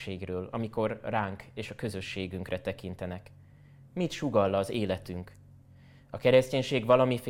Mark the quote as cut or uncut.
uncut